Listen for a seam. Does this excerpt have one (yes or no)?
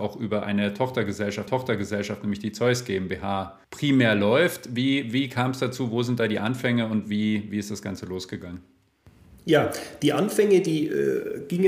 yes